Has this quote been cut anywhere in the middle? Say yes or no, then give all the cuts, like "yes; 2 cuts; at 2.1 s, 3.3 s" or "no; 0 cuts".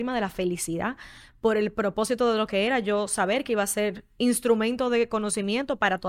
no; 0 cuts